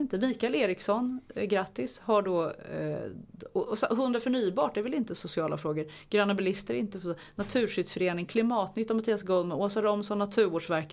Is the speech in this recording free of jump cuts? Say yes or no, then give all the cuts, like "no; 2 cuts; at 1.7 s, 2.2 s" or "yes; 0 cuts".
yes; 0 cuts